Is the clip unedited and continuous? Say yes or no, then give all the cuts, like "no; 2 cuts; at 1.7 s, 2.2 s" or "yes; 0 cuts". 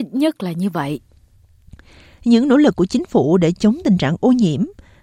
yes; 0 cuts